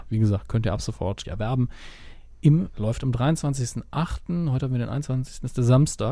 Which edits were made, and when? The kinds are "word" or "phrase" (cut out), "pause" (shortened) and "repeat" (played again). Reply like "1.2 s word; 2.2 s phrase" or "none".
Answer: 1.2 s word; 2.7 s word